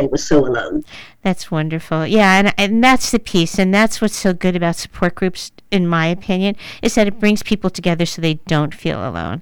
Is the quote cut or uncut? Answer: uncut